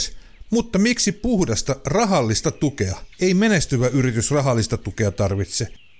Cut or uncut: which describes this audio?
cut